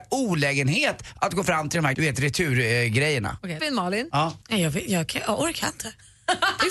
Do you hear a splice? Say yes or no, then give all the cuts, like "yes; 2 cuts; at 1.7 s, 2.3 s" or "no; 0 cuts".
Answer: yes; 3 cuts; at 1.9 s, 3.6 s, 4.4 s